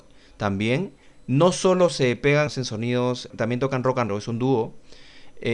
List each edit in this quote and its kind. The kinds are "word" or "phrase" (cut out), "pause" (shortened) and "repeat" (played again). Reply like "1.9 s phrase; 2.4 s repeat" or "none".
1.0 s pause; 2.5 s phrase; 3.3 s word; 4.1 s phrase